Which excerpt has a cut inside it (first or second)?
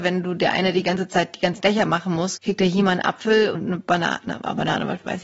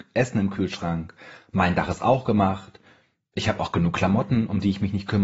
first